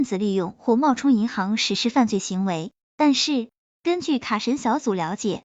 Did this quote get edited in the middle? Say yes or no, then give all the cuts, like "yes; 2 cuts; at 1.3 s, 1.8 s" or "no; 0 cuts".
no; 0 cuts